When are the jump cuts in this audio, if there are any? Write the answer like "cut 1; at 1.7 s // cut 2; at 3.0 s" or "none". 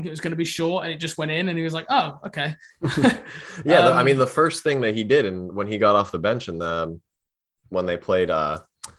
none